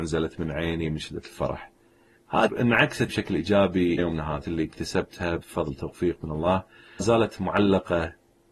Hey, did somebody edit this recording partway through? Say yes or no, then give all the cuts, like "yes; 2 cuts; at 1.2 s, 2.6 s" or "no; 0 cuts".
yes; 5 cuts; at 2.5 s, 3.1 s, 4.0 s, 4.4 s, 7.0 s